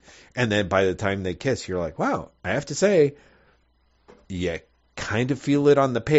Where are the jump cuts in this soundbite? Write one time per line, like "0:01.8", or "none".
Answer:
none